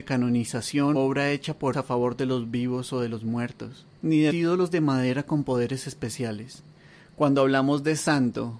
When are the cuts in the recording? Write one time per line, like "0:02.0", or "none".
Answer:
0:00.9
0:01.7
0:04.0
0:04.3